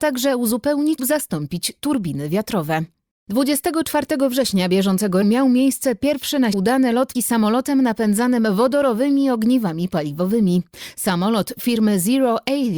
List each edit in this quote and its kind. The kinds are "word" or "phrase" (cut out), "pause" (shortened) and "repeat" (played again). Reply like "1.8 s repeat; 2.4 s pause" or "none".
1.0 s word; 5.2 s word; 6.5 s word; 7.1 s word